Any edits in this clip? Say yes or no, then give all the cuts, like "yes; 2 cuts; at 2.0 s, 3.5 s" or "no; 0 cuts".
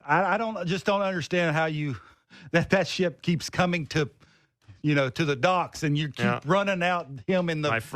no; 0 cuts